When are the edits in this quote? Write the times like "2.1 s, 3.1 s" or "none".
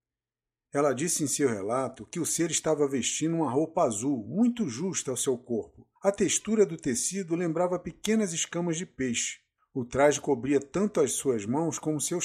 6.0 s, 9.6 s